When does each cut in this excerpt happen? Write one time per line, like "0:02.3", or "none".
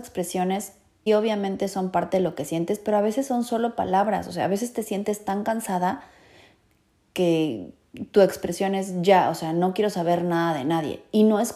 0:01.1